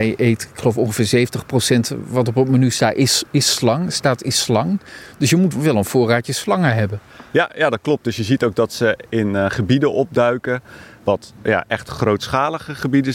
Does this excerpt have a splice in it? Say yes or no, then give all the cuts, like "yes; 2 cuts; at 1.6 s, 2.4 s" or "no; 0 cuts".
yes; 2 cuts; at 5.5 s, 11.4 s